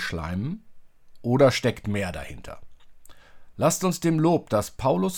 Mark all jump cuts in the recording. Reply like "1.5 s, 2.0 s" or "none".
none

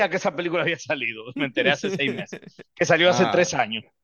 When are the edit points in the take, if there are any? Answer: none

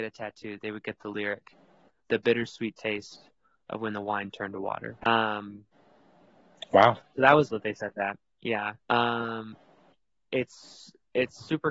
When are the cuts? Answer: 2.0 s, 5.0 s, 7.5 s, 8.8 s

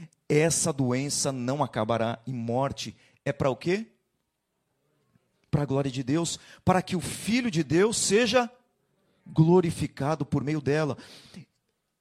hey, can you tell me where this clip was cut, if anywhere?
none

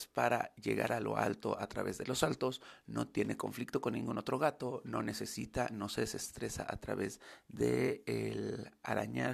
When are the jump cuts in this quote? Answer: none

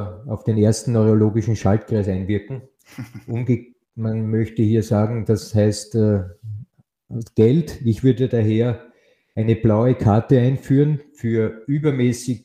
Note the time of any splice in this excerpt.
none

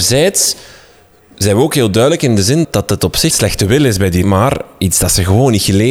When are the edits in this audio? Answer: 2.6 s, 3.3 s, 4.2 s

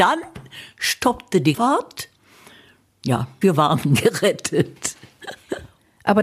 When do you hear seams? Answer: 1.5 s, 3.4 s

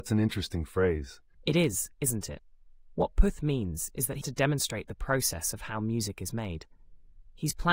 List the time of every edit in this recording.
1.3 s, 4.2 s

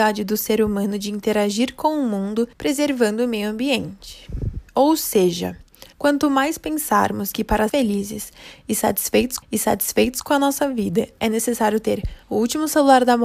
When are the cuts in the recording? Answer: 2.5 s, 4.7 s, 5.9 s, 7.7 s, 9.4 s, 12.2 s

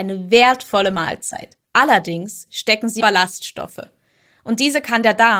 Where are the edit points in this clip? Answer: 1.6 s, 3.0 s

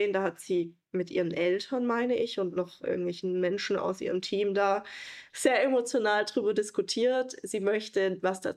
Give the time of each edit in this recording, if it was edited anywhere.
5.3 s

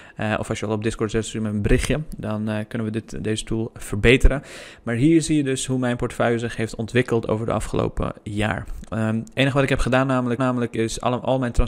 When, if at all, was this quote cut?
10.4 s

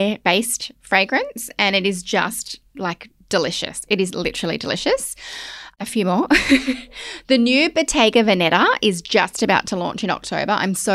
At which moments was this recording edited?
none

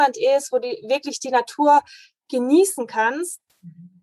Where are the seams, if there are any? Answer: none

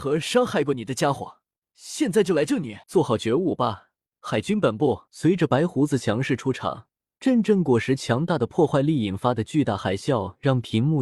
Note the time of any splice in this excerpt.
1.6 s, 2.8 s, 4.1 s, 5.1 s, 7.0 s

